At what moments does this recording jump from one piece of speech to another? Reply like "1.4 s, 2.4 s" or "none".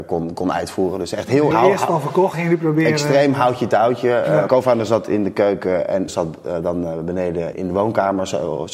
1.5 s, 2.3 s, 4.5 s, 6.1 s, 7.5 s